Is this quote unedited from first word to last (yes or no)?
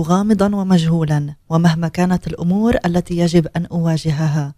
yes